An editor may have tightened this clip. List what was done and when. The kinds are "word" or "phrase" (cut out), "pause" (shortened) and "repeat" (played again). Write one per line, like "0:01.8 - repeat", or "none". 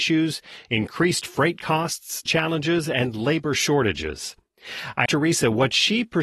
0:02.3 - word
0:05.1 - word